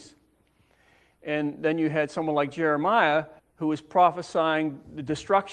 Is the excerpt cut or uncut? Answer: cut